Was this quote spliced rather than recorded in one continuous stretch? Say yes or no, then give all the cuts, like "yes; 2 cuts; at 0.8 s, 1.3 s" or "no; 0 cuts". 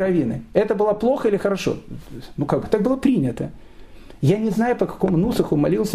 no; 0 cuts